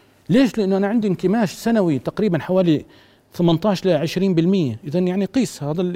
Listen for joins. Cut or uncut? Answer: uncut